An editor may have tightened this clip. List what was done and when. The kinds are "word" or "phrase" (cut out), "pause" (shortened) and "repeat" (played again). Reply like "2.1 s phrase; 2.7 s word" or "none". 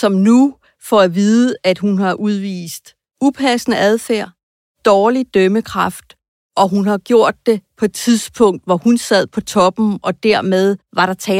none